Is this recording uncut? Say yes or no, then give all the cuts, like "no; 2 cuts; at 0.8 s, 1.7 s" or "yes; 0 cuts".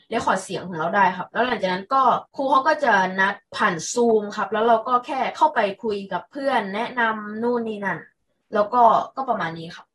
no; 1 cut; at 2.3 s